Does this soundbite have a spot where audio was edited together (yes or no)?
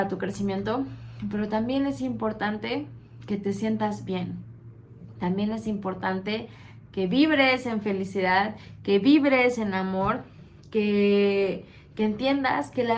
no